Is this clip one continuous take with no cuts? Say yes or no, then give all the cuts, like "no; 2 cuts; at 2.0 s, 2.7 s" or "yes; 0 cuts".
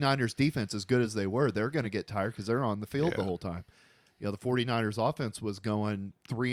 yes; 0 cuts